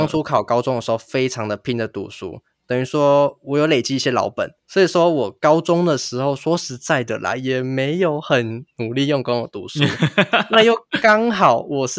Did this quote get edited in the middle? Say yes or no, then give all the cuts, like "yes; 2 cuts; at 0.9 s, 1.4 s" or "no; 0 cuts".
yes; 1 cut; at 4.6 s